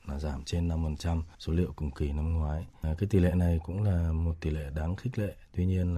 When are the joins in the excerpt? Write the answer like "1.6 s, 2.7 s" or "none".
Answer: none